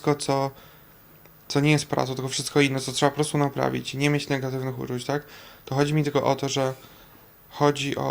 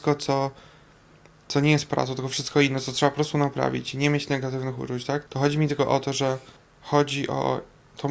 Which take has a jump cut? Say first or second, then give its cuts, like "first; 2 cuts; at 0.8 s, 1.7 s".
second; 2 cuts; at 5.3 s, 6.6 s